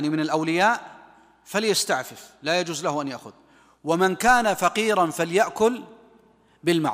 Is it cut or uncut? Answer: uncut